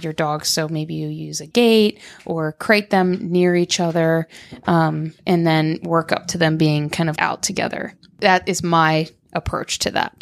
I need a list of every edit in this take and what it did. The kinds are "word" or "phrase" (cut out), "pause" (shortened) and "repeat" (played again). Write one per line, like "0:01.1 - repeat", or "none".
0:05.2 - pause
0:07.2 - word